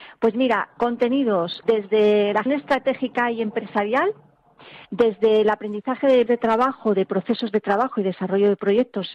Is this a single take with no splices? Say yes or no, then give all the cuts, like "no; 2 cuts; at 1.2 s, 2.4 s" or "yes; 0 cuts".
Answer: no; 4 cuts; at 1.6 s, 2.5 s, 4.8 s, 6.3 s